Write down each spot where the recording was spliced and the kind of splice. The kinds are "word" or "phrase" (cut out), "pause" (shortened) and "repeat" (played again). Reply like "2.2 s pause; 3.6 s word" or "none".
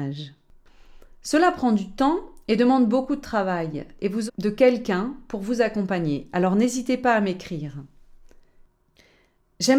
4.3 s phrase